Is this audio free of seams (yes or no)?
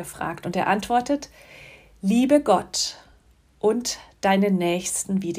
yes